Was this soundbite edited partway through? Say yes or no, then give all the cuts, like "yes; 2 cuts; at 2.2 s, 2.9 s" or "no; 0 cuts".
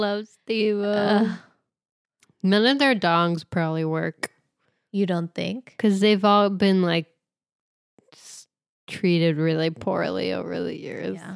no; 0 cuts